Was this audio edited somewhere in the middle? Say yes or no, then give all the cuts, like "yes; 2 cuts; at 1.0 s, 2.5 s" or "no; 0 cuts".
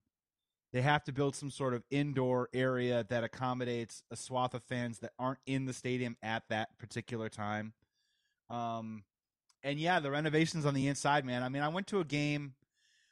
no; 0 cuts